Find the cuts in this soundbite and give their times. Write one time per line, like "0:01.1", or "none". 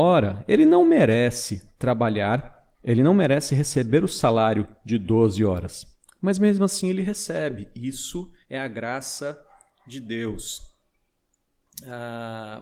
0:02.7
0:08.4